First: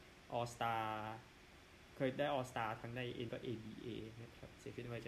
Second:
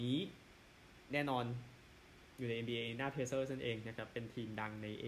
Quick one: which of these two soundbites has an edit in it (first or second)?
first